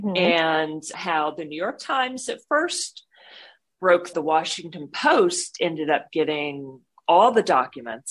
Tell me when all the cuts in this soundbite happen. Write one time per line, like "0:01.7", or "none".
0:00.9
0:04.1